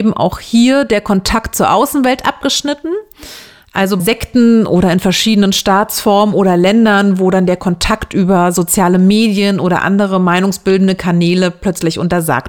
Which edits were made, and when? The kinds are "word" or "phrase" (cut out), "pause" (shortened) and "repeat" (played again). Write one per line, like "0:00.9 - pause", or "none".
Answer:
0:04.0 - word